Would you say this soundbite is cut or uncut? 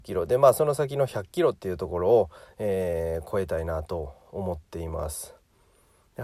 uncut